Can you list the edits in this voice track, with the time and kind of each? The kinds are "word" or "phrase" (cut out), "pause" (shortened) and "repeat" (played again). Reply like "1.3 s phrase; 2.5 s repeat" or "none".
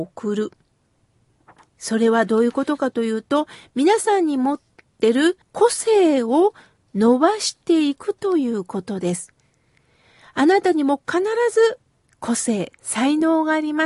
5.4 s pause